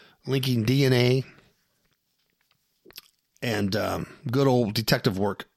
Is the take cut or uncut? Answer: uncut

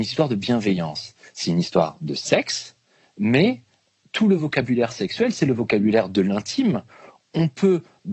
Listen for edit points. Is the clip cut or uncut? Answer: uncut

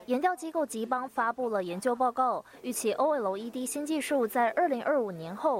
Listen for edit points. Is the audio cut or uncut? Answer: uncut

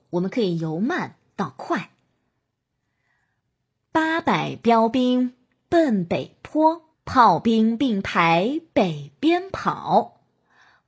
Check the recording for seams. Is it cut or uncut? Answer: cut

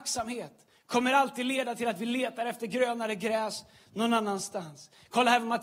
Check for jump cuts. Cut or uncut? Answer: uncut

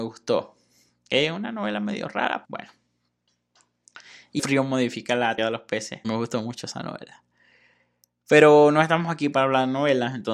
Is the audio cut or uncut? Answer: cut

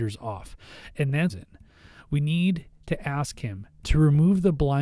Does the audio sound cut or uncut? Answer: cut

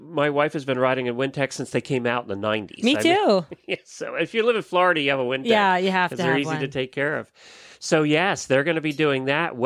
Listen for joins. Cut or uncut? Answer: uncut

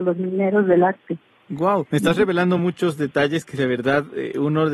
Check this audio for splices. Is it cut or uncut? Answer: uncut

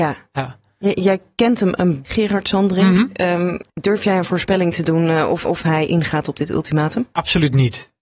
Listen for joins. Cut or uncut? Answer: cut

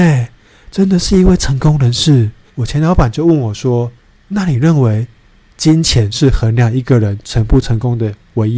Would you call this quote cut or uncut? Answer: cut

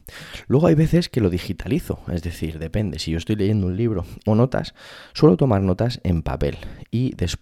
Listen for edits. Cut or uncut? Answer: cut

